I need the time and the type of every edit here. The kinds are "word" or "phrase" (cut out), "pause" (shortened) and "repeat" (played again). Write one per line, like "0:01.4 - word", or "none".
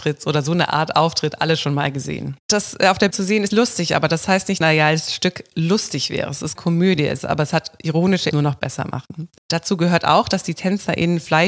0:02.4 - pause
0:03.1 - word
0:03.5 - word
0:04.6 - phrase
0:06.6 - word
0:08.3 - phrase
0:09.4 - pause